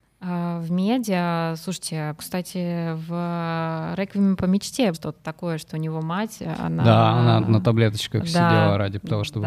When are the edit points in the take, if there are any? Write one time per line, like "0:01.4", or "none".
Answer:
0:02.2
0:04.9
0:07.4